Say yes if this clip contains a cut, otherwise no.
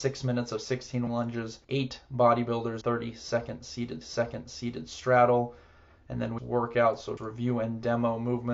yes